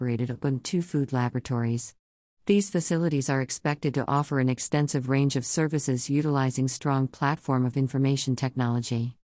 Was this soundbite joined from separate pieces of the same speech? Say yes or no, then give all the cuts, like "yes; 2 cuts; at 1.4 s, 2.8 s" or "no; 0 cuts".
no; 0 cuts